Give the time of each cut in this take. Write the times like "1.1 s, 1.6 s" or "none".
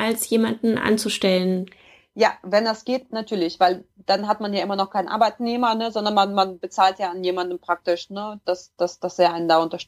none